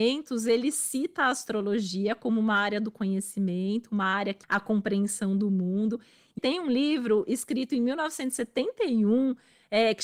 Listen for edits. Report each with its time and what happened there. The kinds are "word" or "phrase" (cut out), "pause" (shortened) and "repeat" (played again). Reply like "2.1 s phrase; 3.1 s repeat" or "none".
4.4 s word; 6.4 s word